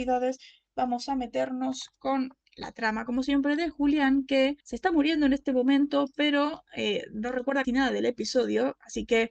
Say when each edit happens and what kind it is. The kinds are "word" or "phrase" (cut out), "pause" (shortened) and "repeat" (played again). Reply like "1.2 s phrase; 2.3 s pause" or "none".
4.6 s pause; 7.6 s word

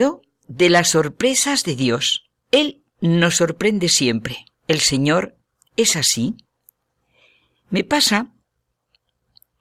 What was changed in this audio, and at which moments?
2.4 s pause; 4.5 s pause

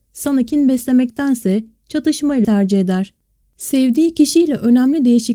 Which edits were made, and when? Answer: 2.4 s word; 3.4 s pause

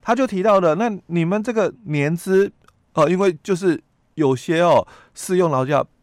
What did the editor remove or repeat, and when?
none

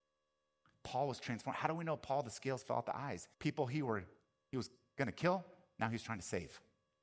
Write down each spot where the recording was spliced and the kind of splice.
3.3 s pause

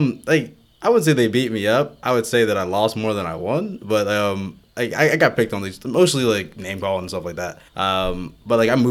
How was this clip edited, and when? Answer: 7.7 s pause

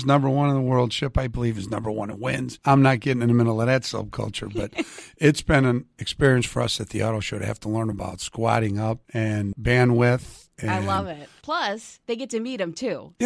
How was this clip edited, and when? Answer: none

